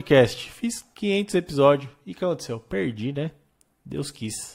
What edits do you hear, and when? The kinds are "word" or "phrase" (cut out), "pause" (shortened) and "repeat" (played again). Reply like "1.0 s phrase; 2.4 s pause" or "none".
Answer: 0.9 s pause